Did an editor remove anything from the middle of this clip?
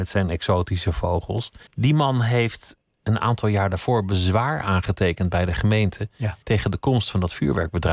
yes; 2 cuts; at 1.7 s, 6.4 s

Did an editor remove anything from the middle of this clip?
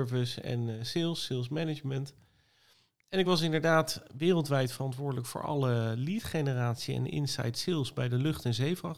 no; 0 cuts

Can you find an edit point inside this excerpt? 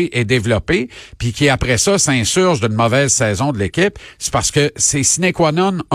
no; 0 cuts

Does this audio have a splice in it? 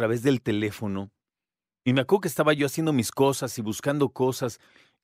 no; 0 cuts

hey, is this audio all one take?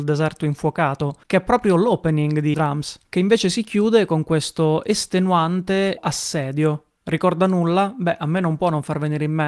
no; 3 cuts; at 1.2 s, 2.5 s, 6.0 s

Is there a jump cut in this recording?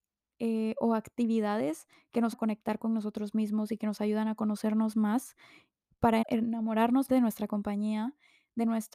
yes; 3 cuts; at 2.3 s, 6.2 s, 7.1 s

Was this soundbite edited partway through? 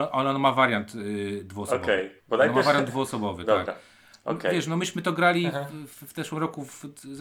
yes; 1 cut; at 2.2 s

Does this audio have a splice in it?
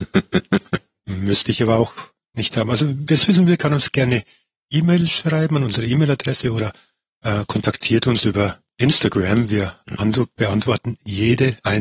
no; 0 cuts

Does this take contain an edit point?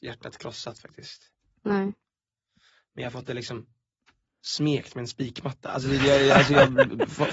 no; 0 cuts

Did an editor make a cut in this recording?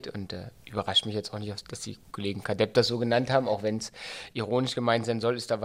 yes; 1 cut; at 2.4 s

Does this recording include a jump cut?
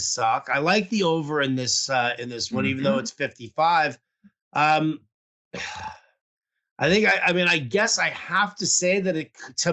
no; 0 cuts

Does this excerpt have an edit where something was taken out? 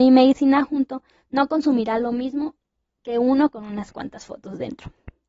no; 0 cuts

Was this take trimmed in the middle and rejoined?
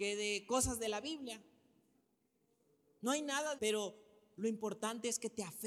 yes; 1 cut; at 3.5 s

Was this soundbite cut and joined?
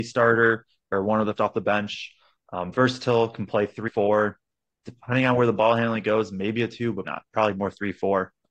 yes; 3 cuts; at 1.4 s, 3.9 s, 7.0 s

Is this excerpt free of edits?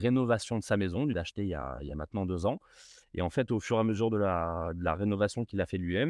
no; 1 cut; at 1.1 s

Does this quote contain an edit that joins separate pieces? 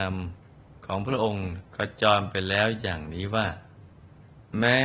yes; 1 cut; at 1.7 s

